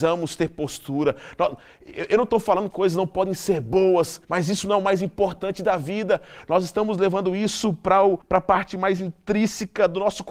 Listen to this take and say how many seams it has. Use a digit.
3